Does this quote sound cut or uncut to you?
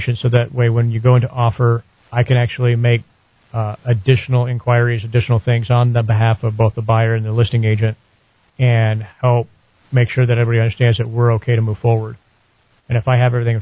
uncut